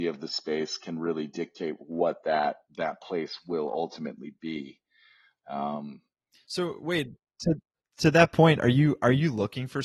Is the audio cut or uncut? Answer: uncut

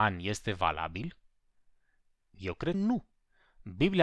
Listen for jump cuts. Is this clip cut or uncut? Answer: cut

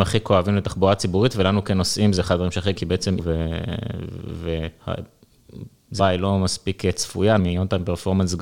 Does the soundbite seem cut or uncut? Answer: cut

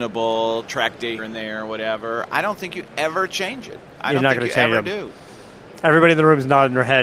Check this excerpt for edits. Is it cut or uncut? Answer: cut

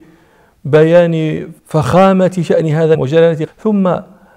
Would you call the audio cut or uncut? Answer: cut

